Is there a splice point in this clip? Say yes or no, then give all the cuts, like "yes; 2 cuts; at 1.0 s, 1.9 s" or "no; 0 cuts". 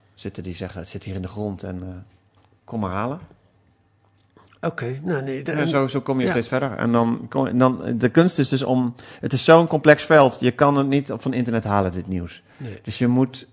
no; 0 cuts